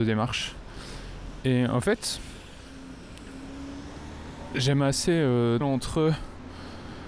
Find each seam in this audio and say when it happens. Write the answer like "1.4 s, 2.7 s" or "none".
5.6 s